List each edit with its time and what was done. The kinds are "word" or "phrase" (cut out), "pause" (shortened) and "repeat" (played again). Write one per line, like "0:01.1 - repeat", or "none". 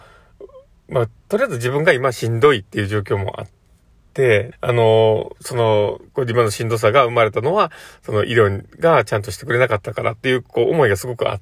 0:04.5 - word
0:06.0 - word